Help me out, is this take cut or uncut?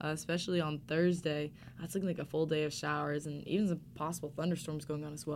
uncut